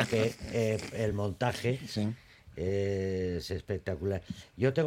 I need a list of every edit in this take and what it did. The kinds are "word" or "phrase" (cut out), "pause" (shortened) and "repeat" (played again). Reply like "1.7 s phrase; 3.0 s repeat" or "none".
none

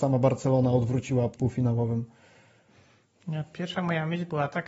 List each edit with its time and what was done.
1.4 s word

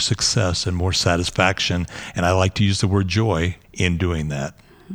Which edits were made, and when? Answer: 3.6 s pause

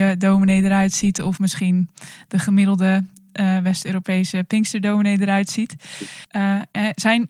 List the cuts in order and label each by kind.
6.2 s pause

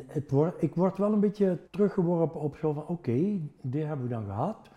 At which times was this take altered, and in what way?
1.7 s pause

